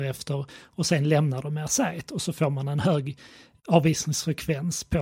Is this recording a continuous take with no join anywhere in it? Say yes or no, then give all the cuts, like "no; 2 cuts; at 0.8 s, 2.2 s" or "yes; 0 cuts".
yes; 0 cuts